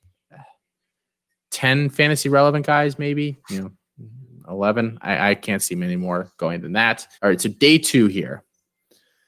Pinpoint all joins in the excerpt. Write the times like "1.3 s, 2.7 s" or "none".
7.1 s